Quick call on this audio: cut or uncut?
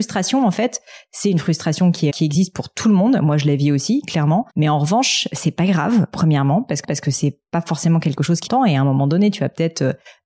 cut